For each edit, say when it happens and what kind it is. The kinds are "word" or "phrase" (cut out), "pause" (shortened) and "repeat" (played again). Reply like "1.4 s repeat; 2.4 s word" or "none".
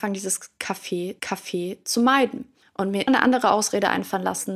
1.2 s repeat; 2.6 s pause; 3.1 s word